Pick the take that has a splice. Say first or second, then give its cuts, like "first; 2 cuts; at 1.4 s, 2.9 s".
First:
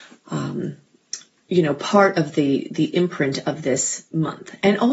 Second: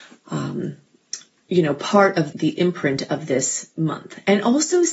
second; 1 cut; at 2.3 s